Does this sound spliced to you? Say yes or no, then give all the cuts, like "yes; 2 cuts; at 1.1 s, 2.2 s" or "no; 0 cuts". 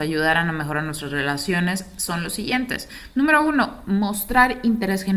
no; 0 cuts